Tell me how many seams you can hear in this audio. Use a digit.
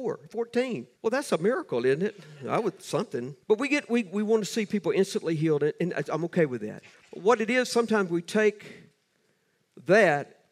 3